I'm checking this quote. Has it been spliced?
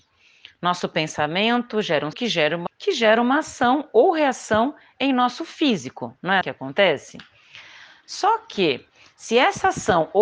yes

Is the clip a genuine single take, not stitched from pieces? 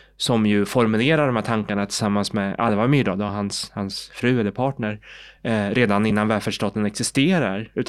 yes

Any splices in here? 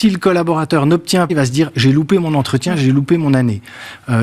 yes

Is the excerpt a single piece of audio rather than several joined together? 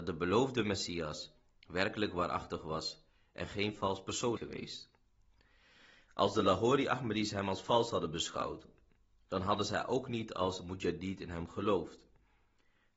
no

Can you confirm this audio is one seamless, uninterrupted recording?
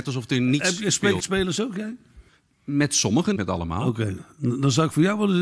no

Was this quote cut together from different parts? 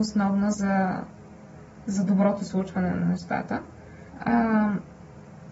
yes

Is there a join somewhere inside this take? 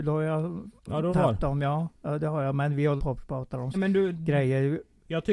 yes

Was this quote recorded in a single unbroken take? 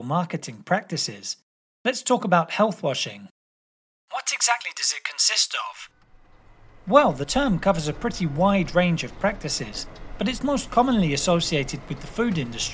yes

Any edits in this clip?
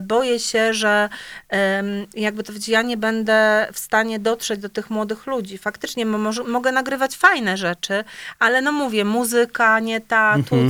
no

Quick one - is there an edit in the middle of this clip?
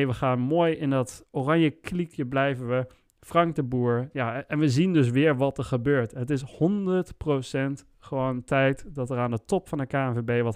no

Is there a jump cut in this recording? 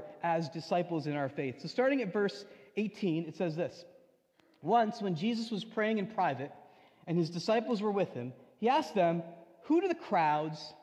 no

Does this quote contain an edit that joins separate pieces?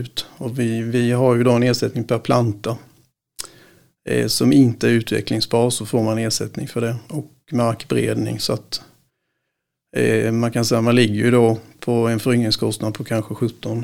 no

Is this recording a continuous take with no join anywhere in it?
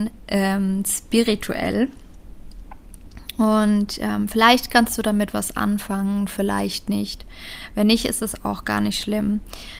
yes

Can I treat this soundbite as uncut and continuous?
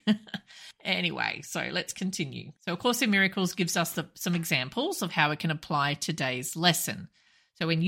no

